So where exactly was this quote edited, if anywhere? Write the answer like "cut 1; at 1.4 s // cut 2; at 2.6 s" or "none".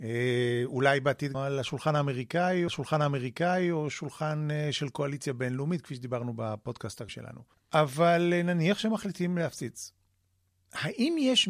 cut 1; at 1.3 s // cut 2; at 2.7 s // cut 3; at 7.1 s // cut 4; at 7.5 s